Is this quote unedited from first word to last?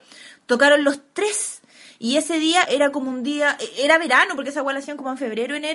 no; 1 cut; at 2.6 s

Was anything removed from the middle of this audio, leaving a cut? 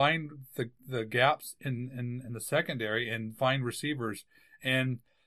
no; 0 cuts

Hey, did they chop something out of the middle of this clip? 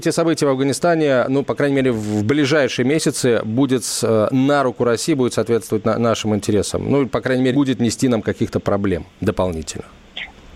yes; 1 cut; at 7.5 s

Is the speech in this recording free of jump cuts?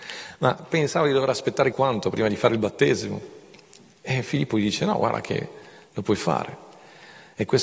no; 1 cut; at 1.7 s

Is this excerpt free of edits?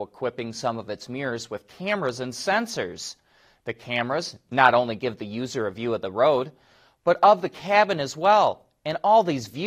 yes; 0 cuts

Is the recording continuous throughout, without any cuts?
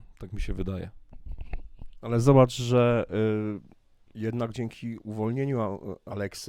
yes; 0 cuts

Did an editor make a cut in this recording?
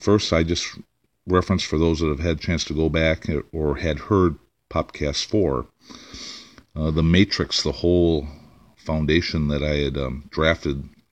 no; 0 cuts

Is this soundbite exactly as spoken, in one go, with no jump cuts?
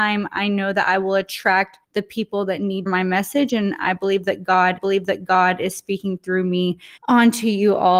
no; 4 cuts; at 1.8 s, 2.9 s, 4.8 s, 7.0 s

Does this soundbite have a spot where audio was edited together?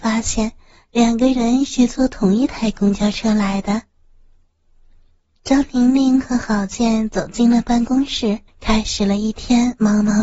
yes; 1 cut; at 8.5 s

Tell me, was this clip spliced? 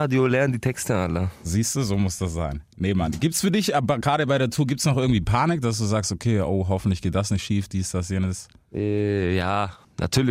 no; 0 cuts

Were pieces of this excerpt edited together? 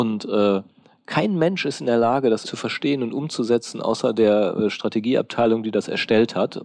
yes; 1 cut; at 2.4 s

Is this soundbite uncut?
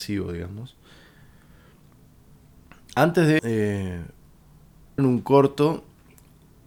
no; 2 cuts; at 3.4 s, 5.0 s

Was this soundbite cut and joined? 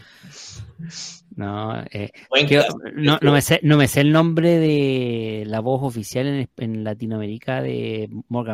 no; 0 cuts

